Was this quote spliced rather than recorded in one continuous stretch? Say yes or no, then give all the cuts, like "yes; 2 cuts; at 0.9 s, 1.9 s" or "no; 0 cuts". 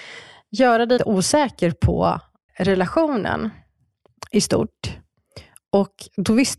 yes; 2 cuts; at 1.0 s, 2.5 s